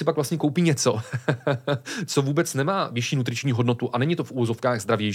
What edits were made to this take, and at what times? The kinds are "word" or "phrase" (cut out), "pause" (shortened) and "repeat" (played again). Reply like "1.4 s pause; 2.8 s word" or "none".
none